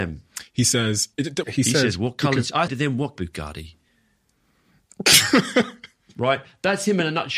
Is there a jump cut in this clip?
yes; 4 cuts; at 1.1 s, 1.4 s, 2.7 s, 3.2 s

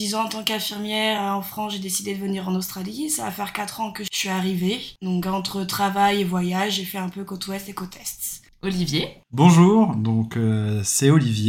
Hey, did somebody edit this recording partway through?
no; 0 cuts

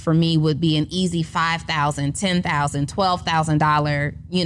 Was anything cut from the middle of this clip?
no; 0 cuts

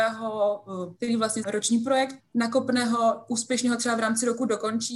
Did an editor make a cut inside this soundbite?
yes; 3 cuts; at 1.0 s, 1.4 s, 2.2 s

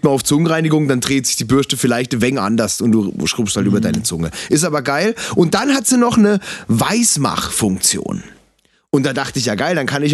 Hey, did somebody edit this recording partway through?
no; 0 cuts

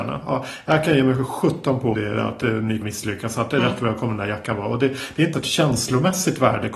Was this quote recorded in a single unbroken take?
no; 3 cuts; at 1.9 s, 2.8 s, 5.3 s

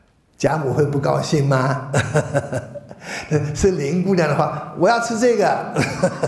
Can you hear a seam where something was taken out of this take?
no; 0 cuts

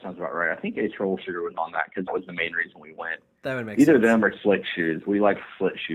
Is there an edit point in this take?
yes; 1 cut; at 2.1 s

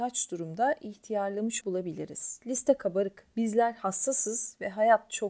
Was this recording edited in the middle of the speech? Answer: yes; 2 cuts; at 1.6 s, 3.3 s

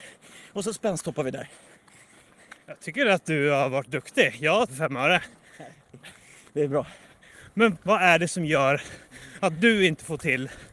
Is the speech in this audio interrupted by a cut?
yes; 3 cuts; at 2.6 s, 4.7 s, 7.8 s

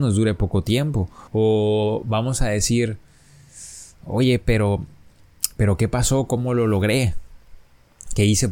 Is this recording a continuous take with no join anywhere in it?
no; 1 cut; at 1.3 s

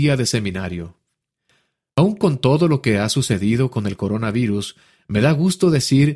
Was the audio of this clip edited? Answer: no; 0 cuts

